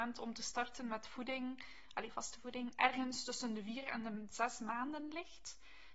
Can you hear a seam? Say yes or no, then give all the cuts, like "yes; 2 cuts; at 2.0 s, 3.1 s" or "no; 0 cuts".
no; 0 cuts